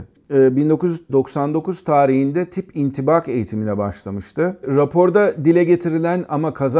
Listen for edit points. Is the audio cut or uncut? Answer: uncut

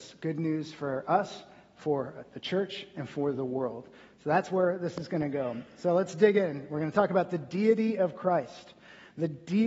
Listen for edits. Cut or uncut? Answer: uncut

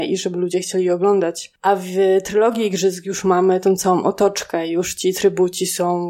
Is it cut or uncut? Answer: uncut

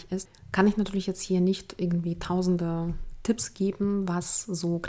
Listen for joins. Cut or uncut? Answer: uncut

